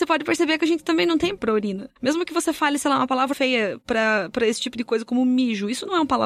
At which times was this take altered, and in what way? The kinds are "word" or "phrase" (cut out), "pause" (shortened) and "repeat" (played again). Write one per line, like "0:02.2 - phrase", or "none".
0:01.4 - word
0:02.0 - pause
0:03.3 - word